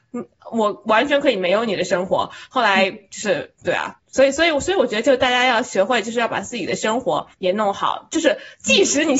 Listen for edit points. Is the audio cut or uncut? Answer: cut